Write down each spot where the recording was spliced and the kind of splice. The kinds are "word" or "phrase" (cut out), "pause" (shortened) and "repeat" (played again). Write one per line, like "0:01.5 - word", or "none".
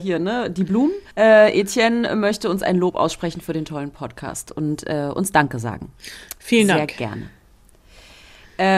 0:01.1 - pause